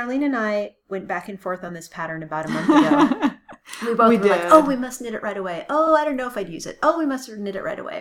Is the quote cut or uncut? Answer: uncut